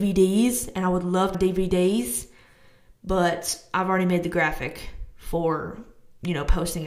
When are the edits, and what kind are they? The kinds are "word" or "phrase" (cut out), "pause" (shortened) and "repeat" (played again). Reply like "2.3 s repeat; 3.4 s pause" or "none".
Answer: 1.3 s phrase

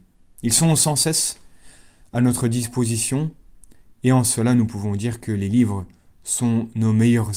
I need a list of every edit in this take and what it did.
none

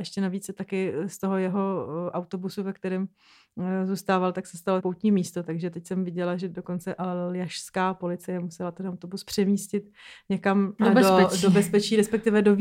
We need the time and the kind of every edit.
4.8 s word

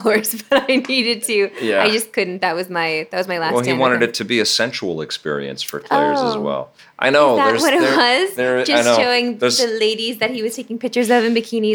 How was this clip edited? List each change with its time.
6.8 s pause

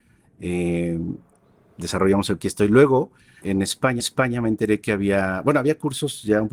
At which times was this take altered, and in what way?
2.4 s phrase; 3.4 s word; 4.0 s repeat

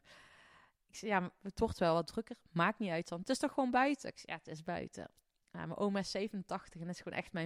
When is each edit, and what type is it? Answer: none

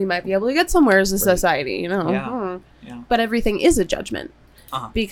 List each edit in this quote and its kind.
none

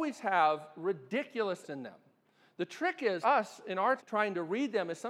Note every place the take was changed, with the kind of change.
1.6 s word; 3.2 s word; 4.0 s word

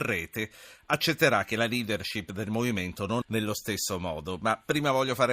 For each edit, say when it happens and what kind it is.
3.2 s word

